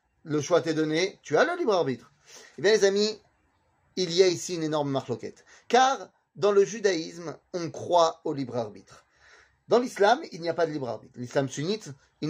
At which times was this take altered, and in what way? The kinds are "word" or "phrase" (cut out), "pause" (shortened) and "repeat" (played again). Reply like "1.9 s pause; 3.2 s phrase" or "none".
none